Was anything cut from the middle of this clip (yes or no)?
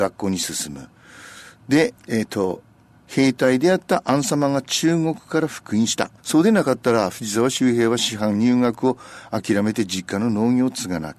yes